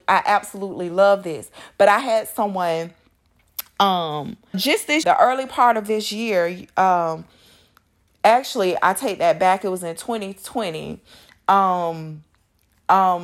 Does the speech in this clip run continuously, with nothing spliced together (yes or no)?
no